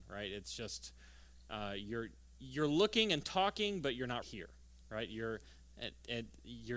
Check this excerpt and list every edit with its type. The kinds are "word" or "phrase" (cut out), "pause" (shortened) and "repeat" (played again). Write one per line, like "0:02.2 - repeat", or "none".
0:04.2 - word